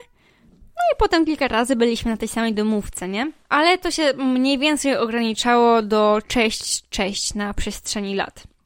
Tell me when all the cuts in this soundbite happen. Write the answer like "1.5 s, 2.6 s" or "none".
3.4 s